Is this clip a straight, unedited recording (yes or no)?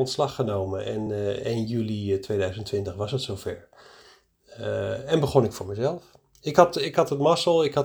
yes